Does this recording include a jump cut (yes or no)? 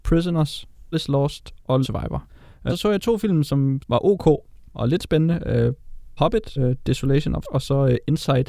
yes